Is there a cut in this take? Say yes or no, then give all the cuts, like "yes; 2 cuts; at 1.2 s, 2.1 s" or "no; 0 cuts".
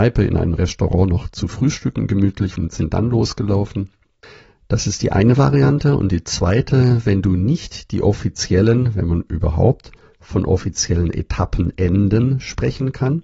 no; 0 cuts